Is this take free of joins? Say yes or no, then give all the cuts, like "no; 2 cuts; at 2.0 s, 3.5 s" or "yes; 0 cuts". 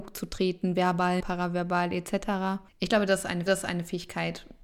no; 3 cuts; at 1.2 s, 2.7 s, 3.5 s